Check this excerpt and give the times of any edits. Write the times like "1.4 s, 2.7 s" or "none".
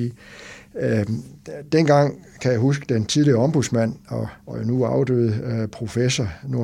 4.4 s